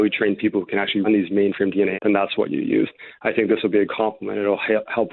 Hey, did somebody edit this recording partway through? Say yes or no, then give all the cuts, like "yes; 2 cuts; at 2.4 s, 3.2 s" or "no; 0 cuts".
yes; 3 cuts; at 1.0 s, 1.9 s, 3.9 s